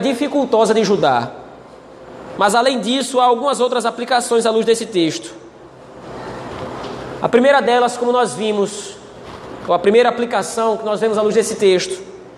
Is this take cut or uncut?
uncut